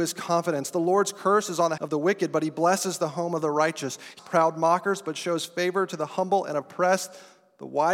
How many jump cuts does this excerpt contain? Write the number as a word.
two